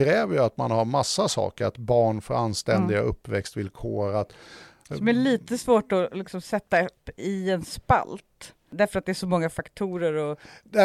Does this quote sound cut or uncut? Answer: uncut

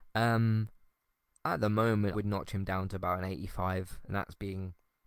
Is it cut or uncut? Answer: cut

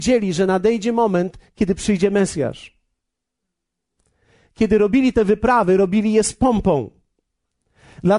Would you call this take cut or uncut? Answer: uncut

